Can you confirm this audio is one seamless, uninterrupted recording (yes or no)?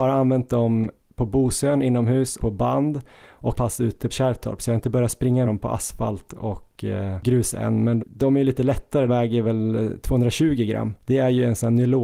no